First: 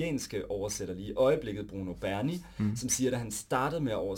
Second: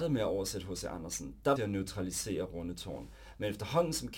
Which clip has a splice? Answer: second; 1 cut; at 1.6 s

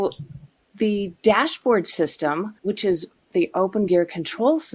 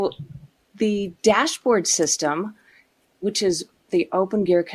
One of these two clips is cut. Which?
first; 1 cut; at 2.6 s

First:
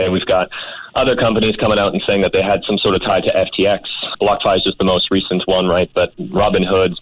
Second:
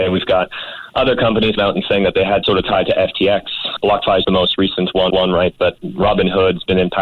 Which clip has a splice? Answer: second; 4 cuts; at 1.6 s, 2.4 s, 4.2 s, 5.1 s

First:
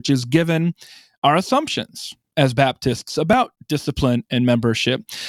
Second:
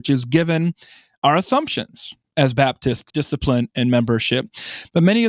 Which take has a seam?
second; 1 cut; at 3.1 s

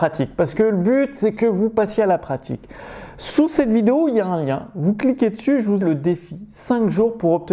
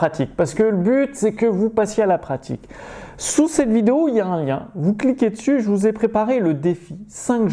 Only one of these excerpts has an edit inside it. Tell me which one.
first; 1 cut; at 5.8 s

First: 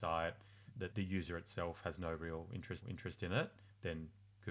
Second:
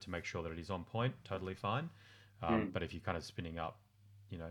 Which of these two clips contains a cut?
first; 2 cuts; at 0.9 s, 2.8 s

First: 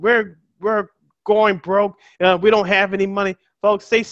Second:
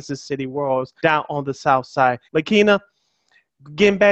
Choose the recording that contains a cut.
second; 2 cuts; at 1.0 s, 2.2 s

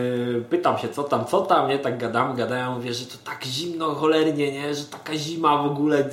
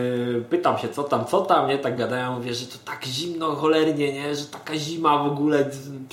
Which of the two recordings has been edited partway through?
second; 1 cut; at 2.0 s

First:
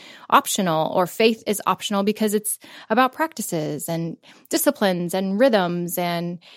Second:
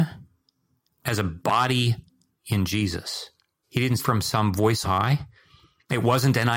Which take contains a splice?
second; 2 cuts; at 4.0 s, 4.8 s

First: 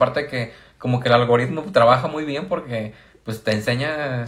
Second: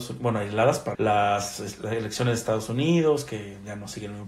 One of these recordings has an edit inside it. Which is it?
second; 1 cut; at 0.9 s

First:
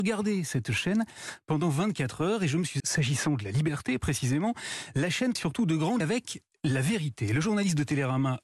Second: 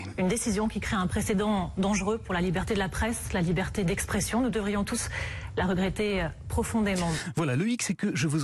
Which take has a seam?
first; 3 cuts; at 2.8 s, 5.4 s, 6.0 s

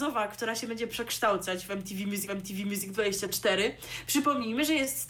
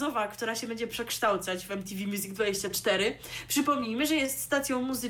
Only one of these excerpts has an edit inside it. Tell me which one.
first; 1 cut; at 2.3 s

